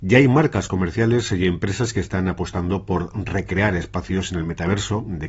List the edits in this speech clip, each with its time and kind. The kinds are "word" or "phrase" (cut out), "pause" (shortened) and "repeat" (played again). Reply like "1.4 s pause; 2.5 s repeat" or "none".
none